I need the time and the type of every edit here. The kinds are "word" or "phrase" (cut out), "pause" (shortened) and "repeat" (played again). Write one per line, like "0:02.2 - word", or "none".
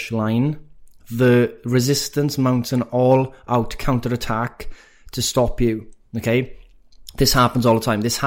none